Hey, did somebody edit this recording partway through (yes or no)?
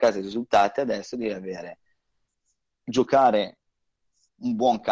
no